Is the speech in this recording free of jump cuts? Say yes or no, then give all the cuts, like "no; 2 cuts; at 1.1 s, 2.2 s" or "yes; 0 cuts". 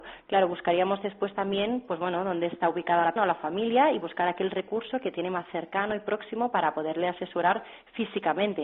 no; 1 cut; at 3.2 s